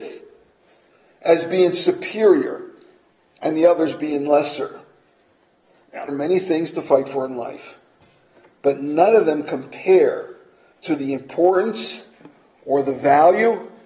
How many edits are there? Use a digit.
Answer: 1